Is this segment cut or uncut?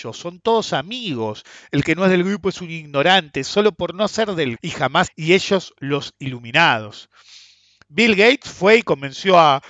cut